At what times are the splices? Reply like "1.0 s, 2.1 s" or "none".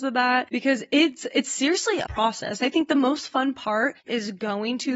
2.1 s, 4.0 s